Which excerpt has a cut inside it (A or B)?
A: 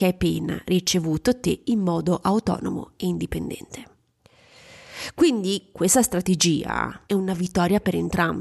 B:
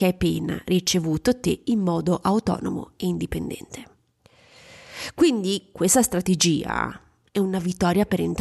A